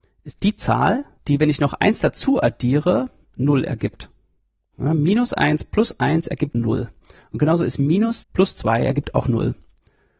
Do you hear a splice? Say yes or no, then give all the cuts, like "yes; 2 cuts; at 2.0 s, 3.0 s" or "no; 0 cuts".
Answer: yes; 2 cuts; at 6.5 s, 8.2 s